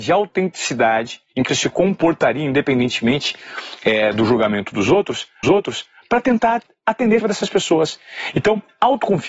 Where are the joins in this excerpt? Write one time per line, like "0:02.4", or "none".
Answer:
0:01.5
0:05.4
0:07.2